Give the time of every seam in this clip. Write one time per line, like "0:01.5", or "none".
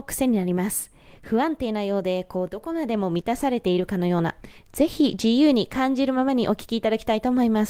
none